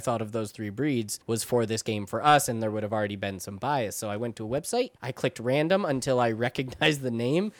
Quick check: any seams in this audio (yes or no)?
yes